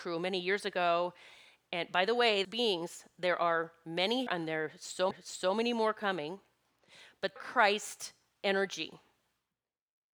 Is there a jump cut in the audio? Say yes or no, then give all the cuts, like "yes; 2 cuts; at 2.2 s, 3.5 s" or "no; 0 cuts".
yes; 4 cuts; at 2.4 s, 4.3 s, 5.1 s, 7.4 s